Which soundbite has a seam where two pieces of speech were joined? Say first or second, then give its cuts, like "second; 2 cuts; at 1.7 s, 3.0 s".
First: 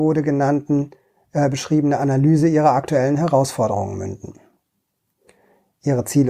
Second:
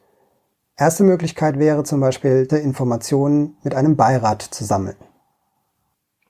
second; 1 cut; at 2.5 s